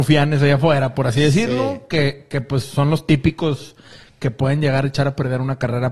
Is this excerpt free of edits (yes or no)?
yes